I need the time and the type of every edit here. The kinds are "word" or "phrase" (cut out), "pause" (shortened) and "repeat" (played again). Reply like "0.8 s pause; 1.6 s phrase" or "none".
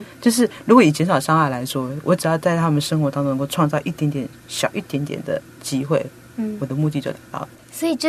none